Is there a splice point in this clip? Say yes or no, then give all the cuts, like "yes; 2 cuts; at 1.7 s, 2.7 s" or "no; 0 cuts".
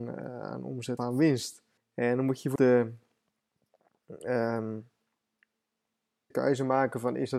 yes; 4 cuts; at 1.0 s, 1.8 s, 2.6 s, 6.3 s